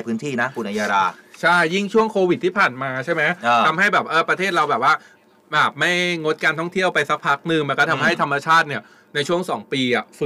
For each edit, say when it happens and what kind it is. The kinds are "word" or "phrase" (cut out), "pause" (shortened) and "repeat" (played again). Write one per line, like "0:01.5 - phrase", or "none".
none